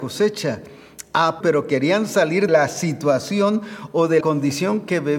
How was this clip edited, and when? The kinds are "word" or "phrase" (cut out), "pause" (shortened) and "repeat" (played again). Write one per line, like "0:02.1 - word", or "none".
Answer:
0:01.4 - phrase
0:02.5 - word
0:04.2 - word